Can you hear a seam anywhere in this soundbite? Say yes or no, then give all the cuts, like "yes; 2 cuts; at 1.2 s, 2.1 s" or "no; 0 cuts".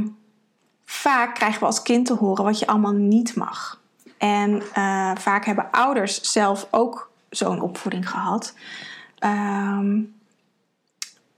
no; 0 cuts